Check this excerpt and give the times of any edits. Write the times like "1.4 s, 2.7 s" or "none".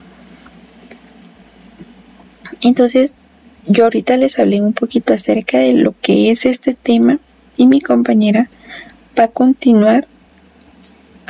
none